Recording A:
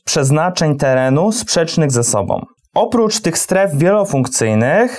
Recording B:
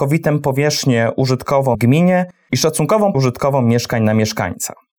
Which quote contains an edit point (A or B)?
B